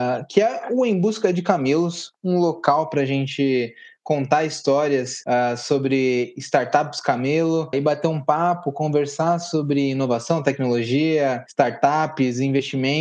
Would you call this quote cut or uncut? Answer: cut